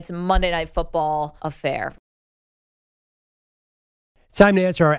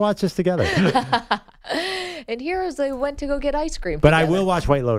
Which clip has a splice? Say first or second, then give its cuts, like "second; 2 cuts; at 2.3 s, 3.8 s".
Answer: first; 1 cut; at 1.4 s